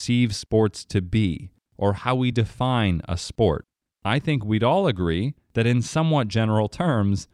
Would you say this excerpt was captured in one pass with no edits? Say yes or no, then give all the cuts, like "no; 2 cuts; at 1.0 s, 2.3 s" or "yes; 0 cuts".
yes; 0 cuts